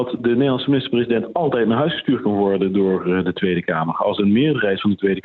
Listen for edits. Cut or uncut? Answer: uncut